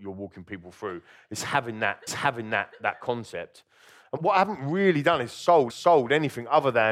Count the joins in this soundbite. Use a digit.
3